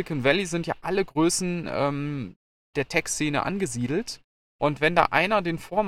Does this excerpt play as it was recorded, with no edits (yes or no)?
yes